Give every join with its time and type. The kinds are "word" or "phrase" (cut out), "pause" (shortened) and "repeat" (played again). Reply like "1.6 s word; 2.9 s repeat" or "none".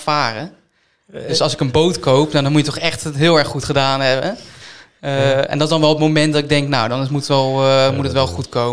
none